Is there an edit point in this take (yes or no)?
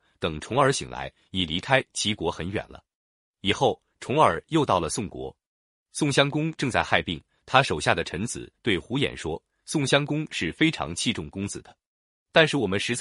no